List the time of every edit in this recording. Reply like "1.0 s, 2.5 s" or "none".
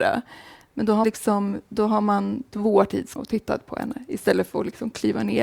1.0 s, 2.5 s, 3.2 s